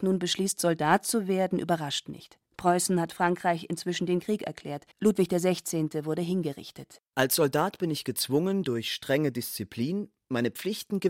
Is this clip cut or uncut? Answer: cut